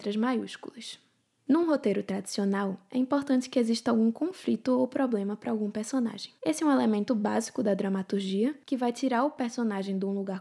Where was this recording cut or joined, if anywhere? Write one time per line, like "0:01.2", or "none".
0:06.4

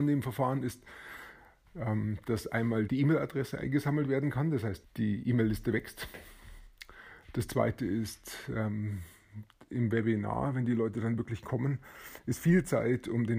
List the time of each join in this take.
0:02.9
0:04.8

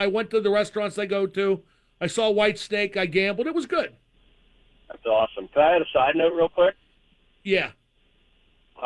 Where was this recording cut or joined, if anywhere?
none

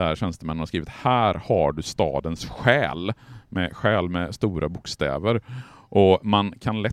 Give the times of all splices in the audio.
none

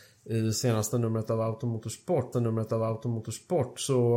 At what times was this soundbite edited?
0:02.3

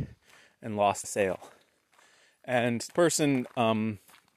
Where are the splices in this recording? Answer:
0:01.0
0:02.9

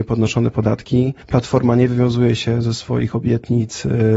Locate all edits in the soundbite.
0:01.2

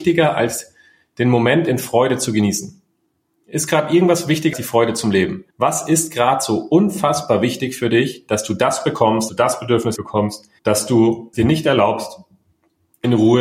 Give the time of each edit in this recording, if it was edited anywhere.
0:04.5
0:05.5
0:09.3
0:10.0
0:10.6
0:11.3

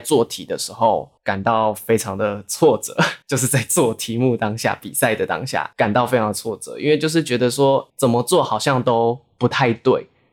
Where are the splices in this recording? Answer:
0:01.2
0:03.2
0:05.7
0:07.9

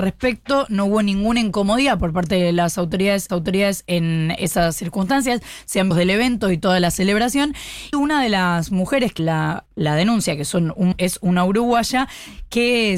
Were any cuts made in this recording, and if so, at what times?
0:03.3
0:05.9
0:07.9
0:09.2
0:09.7
0:10.9

